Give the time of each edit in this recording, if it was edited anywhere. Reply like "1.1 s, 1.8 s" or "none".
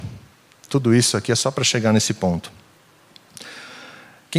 none